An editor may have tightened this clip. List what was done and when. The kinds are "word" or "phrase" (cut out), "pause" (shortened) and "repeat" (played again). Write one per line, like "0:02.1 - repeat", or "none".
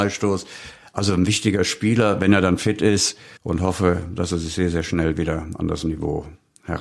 0:03.4 - pause